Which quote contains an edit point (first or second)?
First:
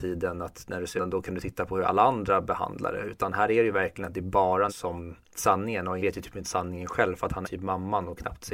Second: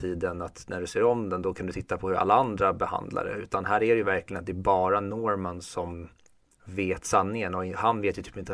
first